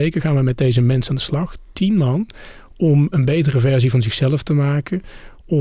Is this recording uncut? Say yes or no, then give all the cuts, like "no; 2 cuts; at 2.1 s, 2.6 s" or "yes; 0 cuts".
no; 1 cut; at 3.1 s